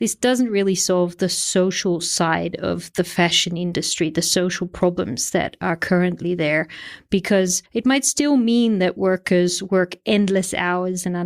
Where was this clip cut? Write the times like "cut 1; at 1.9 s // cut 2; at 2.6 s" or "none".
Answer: cut 1; at 7.7 s